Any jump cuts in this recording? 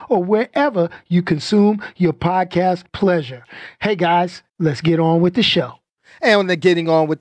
yes; 2 cuts; at 2.9 s, 4.5 s

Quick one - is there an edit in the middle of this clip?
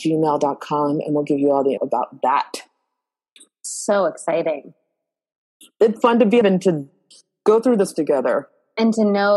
yes; 4 cuts; at 1.8 s, 6.0 s, 6.4 s, 7.9 s

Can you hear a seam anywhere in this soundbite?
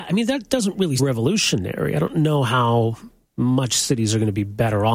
yes; 1 cut; at 1.0 s

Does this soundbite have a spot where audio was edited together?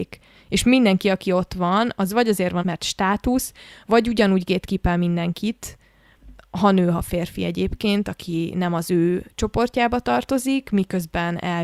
yes; 1 cut; at 2.6 s

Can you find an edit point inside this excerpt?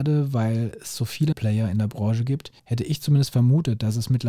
yes; 2 cuts; at 1.3 s, 2.6 s

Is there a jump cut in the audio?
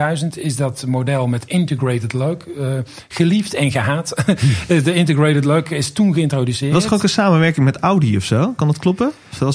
no; 0 cuts

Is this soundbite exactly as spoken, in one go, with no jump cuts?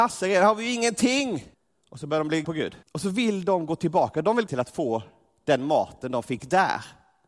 no; 4 cuts; at 1.5 s, 2.4 s, 2.8 s, 4.5 s

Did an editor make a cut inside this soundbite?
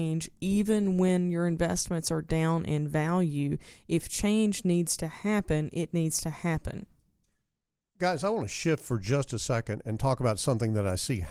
no; 0 cuts

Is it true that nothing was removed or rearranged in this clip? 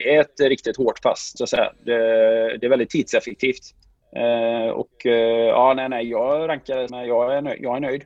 no; 2 cuts; at 1.4 s, 6.9 s

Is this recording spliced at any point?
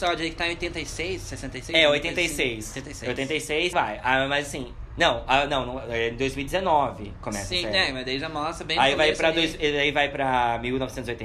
yes; 1 cut; at 3.7 s

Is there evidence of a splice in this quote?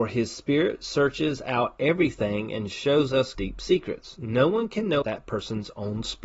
yes; 2 cuts; at 3.3 s, 5.0 s

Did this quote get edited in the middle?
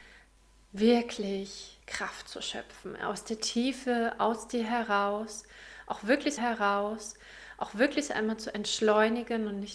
yes; 2 cuts; at 1.8 s, 6.4 s

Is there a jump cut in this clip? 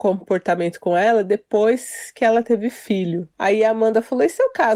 no; 0 cuts

